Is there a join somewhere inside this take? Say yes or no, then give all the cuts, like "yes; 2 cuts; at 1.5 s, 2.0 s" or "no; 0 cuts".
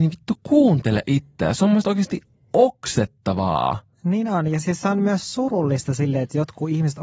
no; 0 cuts